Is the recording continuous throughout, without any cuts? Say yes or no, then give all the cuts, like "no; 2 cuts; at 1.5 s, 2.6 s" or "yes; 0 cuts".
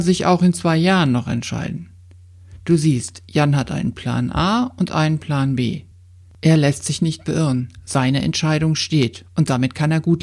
yes; 0 cuts